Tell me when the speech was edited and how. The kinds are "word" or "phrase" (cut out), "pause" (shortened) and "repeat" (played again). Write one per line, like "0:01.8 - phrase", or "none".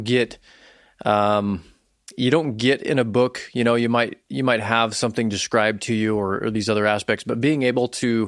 none